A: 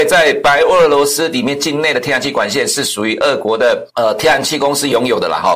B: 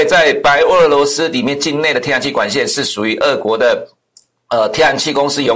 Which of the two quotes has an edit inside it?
A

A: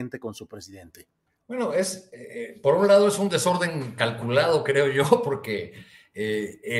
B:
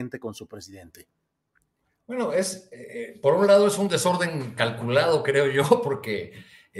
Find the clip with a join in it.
A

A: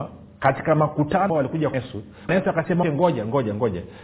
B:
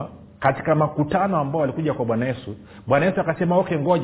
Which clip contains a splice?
A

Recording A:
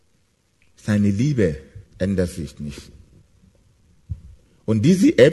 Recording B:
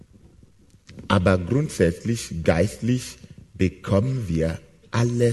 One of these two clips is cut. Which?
A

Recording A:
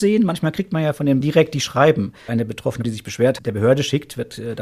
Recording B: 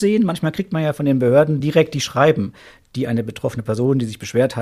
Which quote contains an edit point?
A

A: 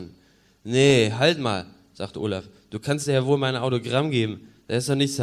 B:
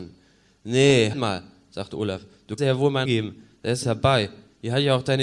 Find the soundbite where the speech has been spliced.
B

